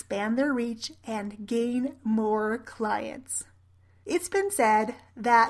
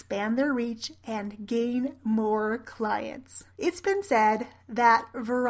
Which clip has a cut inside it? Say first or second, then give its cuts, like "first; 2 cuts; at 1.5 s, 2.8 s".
second; 1 cut; at 3.5 s